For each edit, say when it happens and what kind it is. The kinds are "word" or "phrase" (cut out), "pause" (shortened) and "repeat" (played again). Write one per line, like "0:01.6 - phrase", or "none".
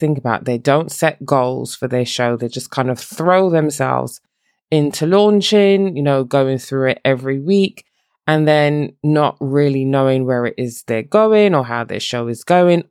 none